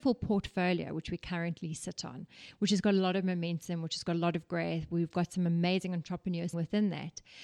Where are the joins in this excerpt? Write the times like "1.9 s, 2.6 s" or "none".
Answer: 6.5 s